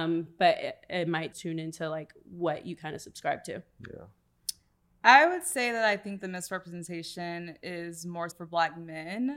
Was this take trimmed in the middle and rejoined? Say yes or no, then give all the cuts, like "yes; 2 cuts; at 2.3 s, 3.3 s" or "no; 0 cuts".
yes; 2 cuts; at 1.3 s, 8.3 s